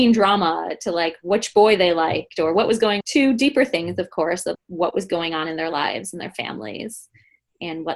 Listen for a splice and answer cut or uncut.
cut